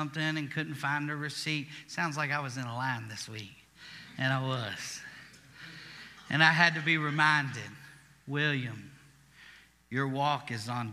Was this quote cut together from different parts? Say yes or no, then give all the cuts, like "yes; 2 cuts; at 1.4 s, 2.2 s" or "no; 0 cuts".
no; 0 cuts